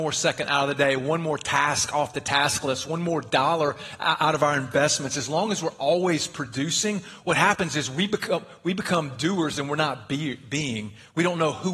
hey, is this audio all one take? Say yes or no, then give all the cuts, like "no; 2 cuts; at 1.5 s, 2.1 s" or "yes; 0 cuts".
yes; 0 cuts